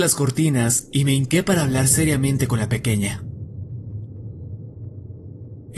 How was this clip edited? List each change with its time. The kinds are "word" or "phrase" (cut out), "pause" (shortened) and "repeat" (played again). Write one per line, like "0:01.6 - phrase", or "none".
none